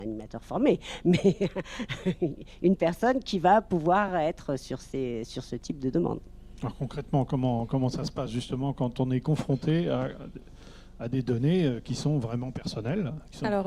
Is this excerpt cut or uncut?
uncut